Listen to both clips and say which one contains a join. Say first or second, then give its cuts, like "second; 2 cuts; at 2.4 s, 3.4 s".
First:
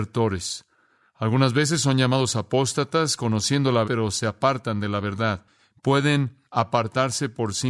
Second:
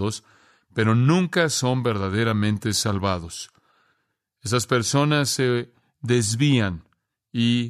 first; 1 cut; at 3.8 s